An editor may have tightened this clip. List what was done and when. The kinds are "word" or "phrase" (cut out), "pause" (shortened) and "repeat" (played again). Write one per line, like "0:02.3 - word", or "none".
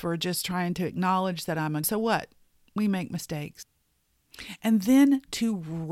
0:01.8 - phrase